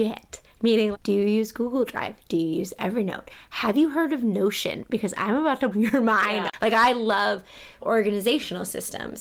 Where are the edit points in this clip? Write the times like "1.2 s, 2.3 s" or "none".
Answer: 0.9 s, 5.7 s, 7.8 s